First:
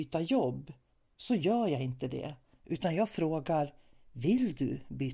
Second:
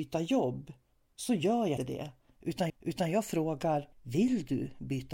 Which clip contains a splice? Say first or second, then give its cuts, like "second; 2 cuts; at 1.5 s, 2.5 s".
second; 3 cuts; at 1.8 s, 2.7 s, 3.9 s